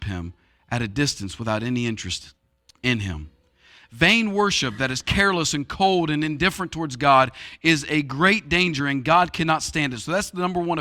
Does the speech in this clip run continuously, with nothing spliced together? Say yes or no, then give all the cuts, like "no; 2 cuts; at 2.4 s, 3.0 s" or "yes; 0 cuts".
yes; 0 cuts